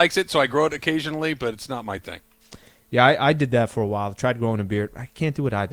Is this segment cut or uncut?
uncut